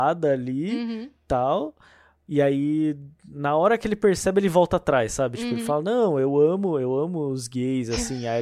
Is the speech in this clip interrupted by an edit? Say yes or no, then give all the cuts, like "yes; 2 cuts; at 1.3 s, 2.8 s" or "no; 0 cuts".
no; 0 cuts